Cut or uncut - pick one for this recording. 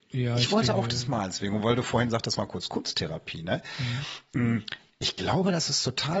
uncut